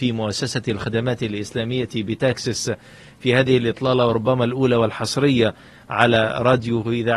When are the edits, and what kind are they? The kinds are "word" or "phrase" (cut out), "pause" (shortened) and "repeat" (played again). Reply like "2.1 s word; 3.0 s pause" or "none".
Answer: none